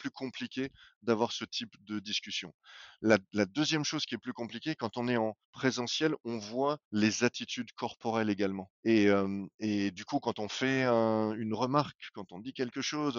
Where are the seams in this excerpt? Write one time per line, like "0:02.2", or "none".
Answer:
0:05.4
0:06.8
0:08.7